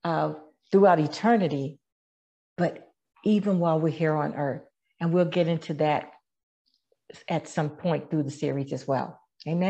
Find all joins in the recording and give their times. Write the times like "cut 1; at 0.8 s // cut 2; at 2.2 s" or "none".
none

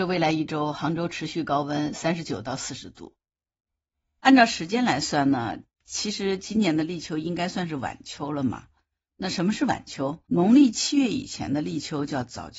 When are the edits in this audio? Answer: cut 1; at 10.3 s

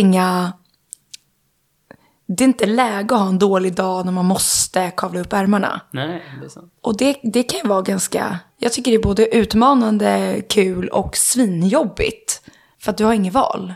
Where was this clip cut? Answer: none

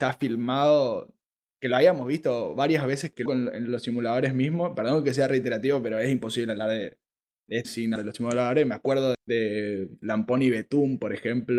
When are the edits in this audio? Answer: cut 1; at 3.3 s // cut 2; at 7.6 s // cut 3; at 8.0 s // cut 4; at 9.1 s

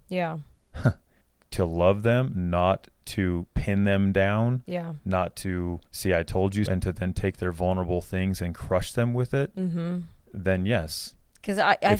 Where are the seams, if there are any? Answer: cut 1; at 1.2 s // cut 2; at 5.9 s // cut 3; at 6.7 s

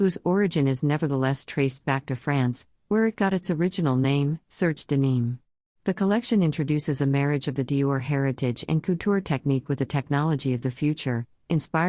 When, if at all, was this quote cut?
cut 1; at 5.5 s

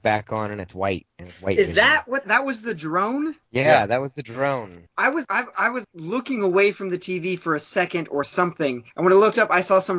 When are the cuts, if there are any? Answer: cut 1; at 2.2 s // cut 2; at 3.4 s // cut 3; at 4.9 s // cut 4; at 5.2 s // cut 5; at 5.8 s // cut 6; at 8.9 s

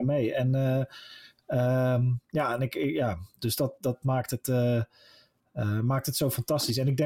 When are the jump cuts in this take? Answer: none

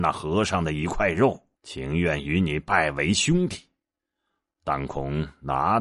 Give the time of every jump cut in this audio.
cut 1; at 1.6 s

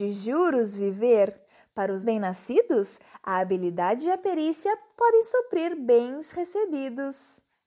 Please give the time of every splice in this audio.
cut 1; at 2.0 s

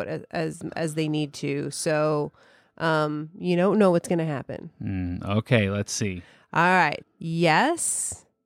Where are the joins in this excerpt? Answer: cut 1; at 7.0 s

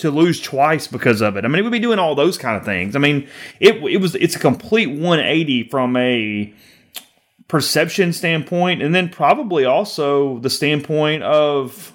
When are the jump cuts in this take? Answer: none

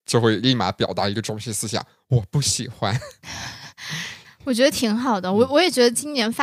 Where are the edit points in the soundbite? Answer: none

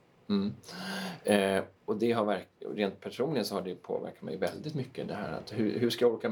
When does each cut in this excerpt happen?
cut 1; at 1.8 s // cut 2; at 2.5 s

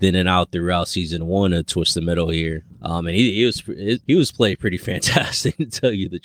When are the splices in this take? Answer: none

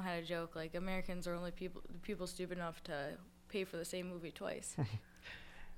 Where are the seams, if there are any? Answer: none

